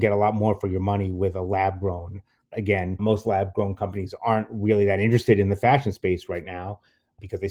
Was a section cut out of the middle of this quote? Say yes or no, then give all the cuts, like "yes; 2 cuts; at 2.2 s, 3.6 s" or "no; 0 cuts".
no; 0 cuts